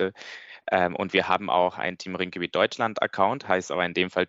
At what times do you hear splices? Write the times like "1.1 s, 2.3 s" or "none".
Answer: none